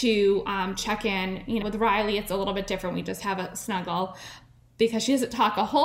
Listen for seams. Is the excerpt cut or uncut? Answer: cut